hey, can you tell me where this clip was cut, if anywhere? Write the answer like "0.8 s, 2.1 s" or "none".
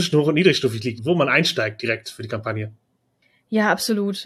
1.0 s